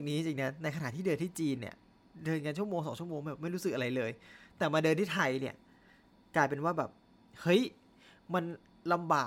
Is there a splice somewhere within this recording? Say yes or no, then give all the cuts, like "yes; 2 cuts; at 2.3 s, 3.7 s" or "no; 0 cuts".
no; 0 cuts